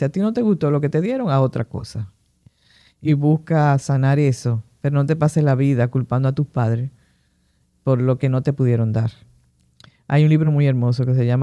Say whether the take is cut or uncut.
uncut